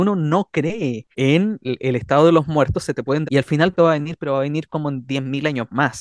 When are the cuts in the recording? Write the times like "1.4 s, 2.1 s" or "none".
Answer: 1.1 s, 3.2 s, 3.8 s